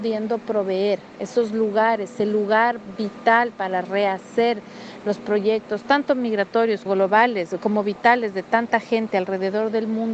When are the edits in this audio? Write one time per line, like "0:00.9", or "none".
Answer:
0:06.9